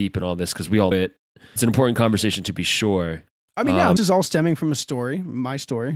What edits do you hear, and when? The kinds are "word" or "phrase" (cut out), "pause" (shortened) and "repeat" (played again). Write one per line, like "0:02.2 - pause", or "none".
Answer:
0:00.9 - word
0:01.6 - word
0:03.5 - word
0:04.0 - word